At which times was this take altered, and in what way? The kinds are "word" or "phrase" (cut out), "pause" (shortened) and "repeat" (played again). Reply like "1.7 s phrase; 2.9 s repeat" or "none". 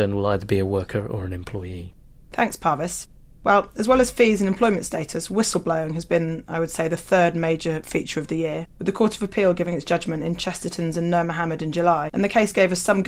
none